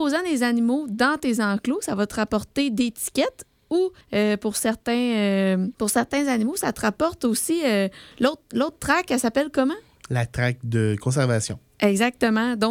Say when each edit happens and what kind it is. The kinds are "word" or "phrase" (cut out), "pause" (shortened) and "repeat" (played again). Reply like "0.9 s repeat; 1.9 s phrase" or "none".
4.0 s pause; 5.7 s pause